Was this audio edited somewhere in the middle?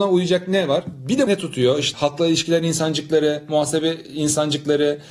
yes; 2 cuts; at 1.3 s, 1.9 s

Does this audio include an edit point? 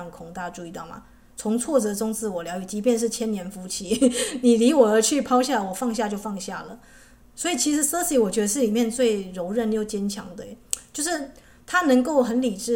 no; 0 cuts

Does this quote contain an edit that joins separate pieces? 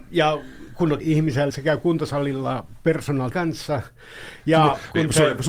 yes; 3 cuts; at 1.0 s, 1.5 s, 3.3 s

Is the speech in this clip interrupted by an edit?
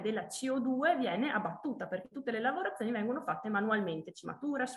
no; 0 cuts

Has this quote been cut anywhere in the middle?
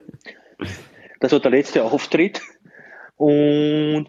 yes; 1 cut; at 1.3 s

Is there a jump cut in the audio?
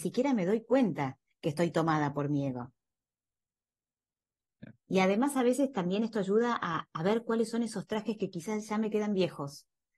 no; 0 cuts

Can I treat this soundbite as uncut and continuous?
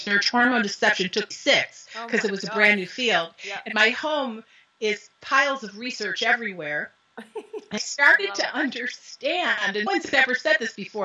no; 4 cuts; at 1.3 s, 5.2 s, 7.8 s, 9.9 s

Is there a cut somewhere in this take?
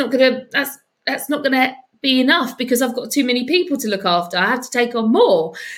no; 0 cuts

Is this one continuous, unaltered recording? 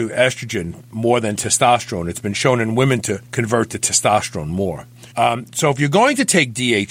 no; 2 cuts; at 3.2 s, 5.1 s

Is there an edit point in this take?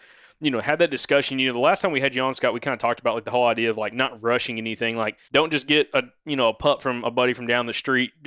yes; 1 cut; at 5.2 s

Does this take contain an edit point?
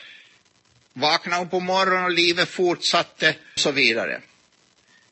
yes; 1 cut; at 3.6 s

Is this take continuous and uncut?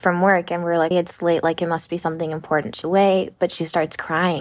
no; 2 cuts; at 0.9 s, 2.8 s

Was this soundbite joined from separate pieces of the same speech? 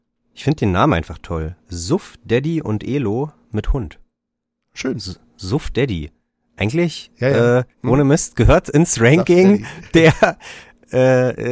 yes; 1 cut; at 7.7 s

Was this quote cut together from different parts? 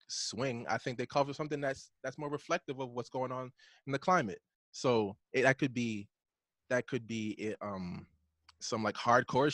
no; 0 cuts

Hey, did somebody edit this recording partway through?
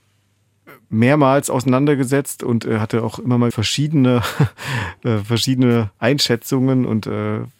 yes; 2 cuts; at 3.5 s, 5.9 s

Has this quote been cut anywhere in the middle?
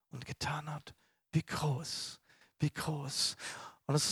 no; 0 cuts

